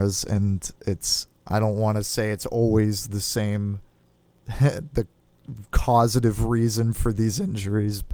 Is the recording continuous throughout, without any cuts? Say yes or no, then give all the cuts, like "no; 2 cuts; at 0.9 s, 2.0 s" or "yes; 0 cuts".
yes; 0 cuts